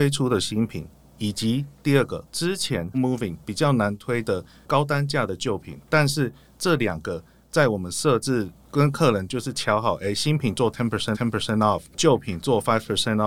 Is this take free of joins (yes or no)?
no